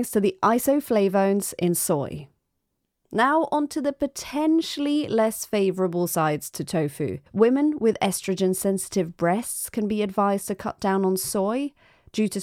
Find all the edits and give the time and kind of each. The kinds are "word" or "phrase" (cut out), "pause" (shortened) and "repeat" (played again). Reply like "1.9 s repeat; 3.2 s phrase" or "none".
7.3 s pause